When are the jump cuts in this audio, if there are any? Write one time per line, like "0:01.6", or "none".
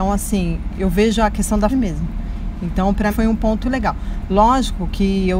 0:01.7
0:03.1
0:03.6